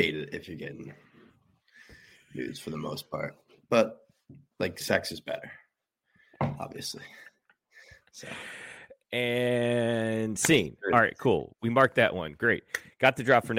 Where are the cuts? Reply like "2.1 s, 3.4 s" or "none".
none